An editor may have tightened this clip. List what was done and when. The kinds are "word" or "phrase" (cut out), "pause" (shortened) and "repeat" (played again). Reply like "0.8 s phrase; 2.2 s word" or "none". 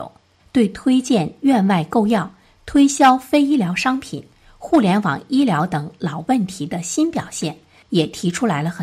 none